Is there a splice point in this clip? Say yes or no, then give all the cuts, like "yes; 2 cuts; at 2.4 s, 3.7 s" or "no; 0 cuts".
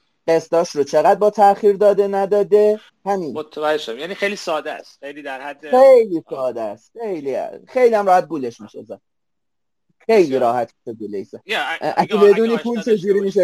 yes; 2 cuts; at 2.9 s, 11.4 s